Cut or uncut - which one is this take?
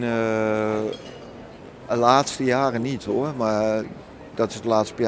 cut